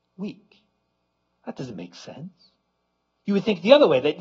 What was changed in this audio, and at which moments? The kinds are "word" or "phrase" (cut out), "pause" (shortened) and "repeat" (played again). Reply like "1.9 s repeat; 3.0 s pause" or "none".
none